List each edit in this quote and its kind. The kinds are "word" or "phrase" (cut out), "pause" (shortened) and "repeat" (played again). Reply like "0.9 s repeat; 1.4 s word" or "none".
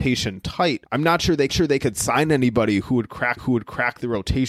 1.5 s repeat; 3.4 s repeat